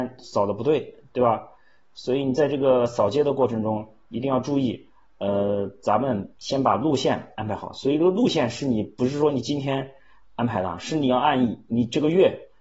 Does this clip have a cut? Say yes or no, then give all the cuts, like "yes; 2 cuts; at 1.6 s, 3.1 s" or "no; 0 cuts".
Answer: no; 0 cuts